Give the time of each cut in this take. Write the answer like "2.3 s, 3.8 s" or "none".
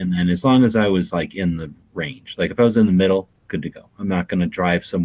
none